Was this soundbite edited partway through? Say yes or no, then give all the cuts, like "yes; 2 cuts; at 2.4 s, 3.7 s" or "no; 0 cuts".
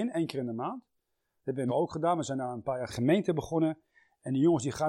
yes; 2 cuts; at 1.7 s, 2.9 s